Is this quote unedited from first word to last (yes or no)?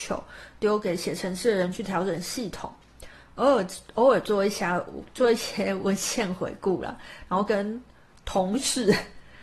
yes